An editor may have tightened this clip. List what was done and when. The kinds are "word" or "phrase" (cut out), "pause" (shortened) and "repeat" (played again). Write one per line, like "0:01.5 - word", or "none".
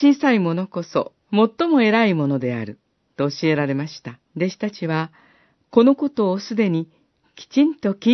0:01.2 - pause
0:04.3 - pause